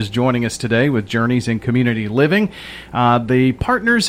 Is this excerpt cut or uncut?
uncut